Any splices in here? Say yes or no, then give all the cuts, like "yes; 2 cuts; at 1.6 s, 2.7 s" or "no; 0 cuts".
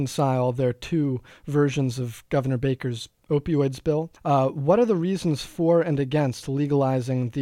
yes; 1 cut; at 4.2 s